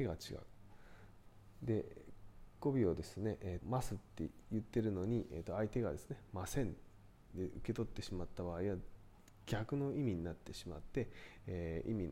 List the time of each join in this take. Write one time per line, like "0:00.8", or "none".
0:03.6